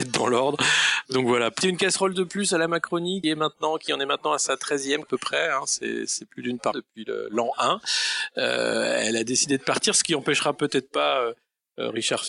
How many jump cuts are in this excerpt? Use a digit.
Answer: 4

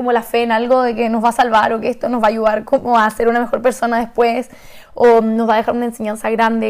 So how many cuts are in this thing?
0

